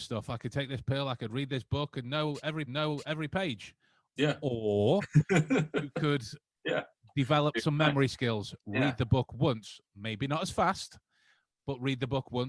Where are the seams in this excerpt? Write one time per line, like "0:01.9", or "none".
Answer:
0:02.7